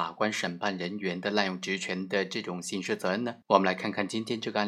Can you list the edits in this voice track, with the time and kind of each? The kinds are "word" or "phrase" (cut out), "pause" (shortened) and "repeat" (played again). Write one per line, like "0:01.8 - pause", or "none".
0:03.4 - pause